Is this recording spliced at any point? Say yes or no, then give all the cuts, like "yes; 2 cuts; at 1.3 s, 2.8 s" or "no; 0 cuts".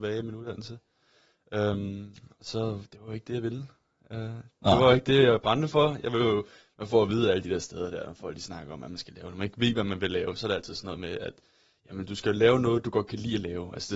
no; 0 cuts